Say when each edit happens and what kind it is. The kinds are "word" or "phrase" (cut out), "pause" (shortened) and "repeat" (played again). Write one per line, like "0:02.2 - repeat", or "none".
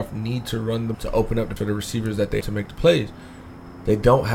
0:00.9 - word
0:01.6 - word
0:02.4 - word